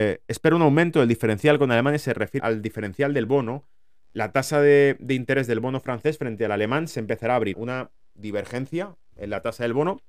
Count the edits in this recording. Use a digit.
2